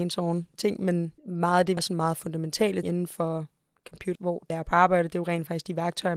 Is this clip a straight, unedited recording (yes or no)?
no